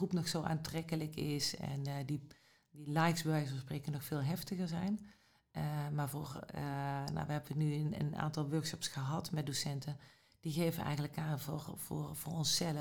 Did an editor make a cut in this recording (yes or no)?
no